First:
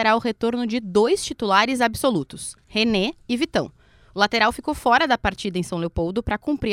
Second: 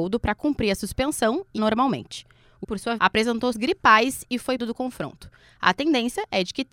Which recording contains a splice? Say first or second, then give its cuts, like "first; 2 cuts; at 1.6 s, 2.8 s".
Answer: second; 5 cuts; at 1.6 s, 2.6 s, 3.0 s, 3.5 s, 4.6 s